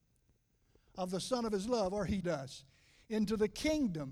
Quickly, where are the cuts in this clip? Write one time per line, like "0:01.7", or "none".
0:02.2